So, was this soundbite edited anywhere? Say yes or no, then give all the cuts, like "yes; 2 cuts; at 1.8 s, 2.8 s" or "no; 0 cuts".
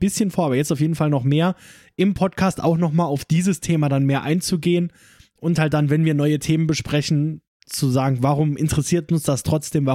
no; 0 cuts